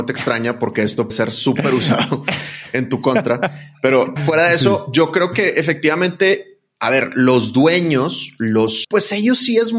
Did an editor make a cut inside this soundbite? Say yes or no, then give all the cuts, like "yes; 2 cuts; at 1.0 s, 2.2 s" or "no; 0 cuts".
yes; 3 cuts; at 1.1 s, 4.2 s, 8.8 s